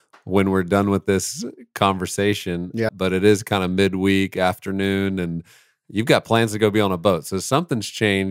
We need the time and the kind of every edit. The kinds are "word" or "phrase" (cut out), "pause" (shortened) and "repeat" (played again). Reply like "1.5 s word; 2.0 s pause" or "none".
2.9 s word